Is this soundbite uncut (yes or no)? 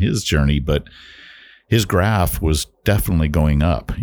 yes